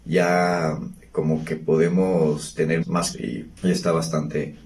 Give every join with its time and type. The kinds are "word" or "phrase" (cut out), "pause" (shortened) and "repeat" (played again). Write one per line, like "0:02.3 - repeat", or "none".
0:02.8 - word
0:03.1 - word
0:03.6 - pause